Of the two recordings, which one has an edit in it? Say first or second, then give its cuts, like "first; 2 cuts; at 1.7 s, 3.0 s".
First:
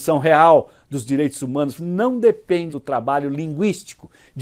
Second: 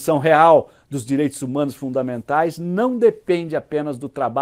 first; 2 cuts; at 1.8 s, 2.7 s